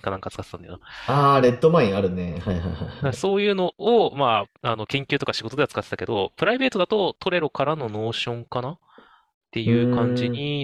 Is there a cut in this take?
no; 0 cuts

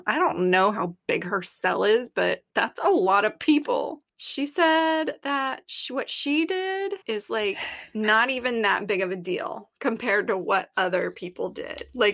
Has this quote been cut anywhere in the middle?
yes; 3 cuts; at 2.5 s, 4.1 s, 7.0 s

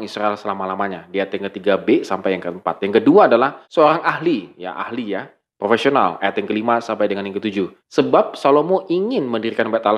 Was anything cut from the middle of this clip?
yes; 2 cuts; at 3.6 s, 7.8 s

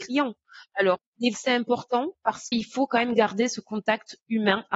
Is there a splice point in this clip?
yes; 2 cuts; at 1.3 s, 2.5 s

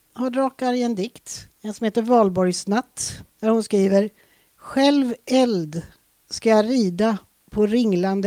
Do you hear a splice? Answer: yes; 2 cuts; at 1.5 s, 3.3 s

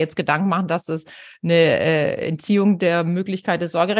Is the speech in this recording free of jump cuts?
yes; 0 cuts

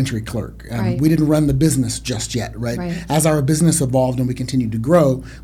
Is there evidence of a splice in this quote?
no; 0 cuts

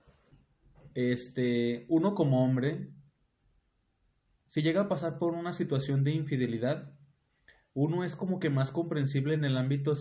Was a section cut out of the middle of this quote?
no; 0 cuts

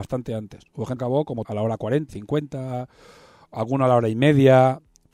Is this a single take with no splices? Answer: no; 3 cuts; at 1.0 s, 1.4 s, 2.1 s

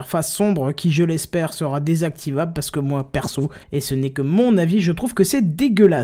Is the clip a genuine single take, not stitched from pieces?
no; 1 cut; at 3.6 s

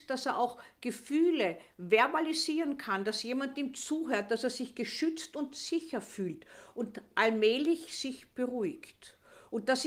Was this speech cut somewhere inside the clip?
no; 0 cuts

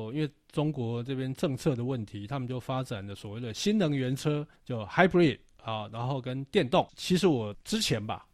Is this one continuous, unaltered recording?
no; 1 cut; at 4.6 s

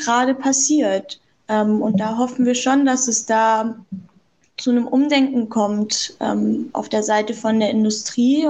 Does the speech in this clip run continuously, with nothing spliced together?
yes; 0 cuts

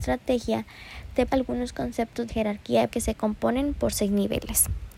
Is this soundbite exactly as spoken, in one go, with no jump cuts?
no; 3 cuts; at 1.3 s, 2.3 s, 2.9 s

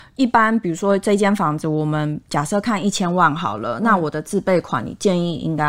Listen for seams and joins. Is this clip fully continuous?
yes; 0 cuts

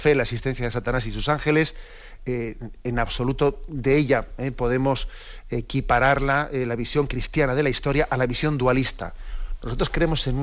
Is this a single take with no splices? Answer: yes; 0 cuts

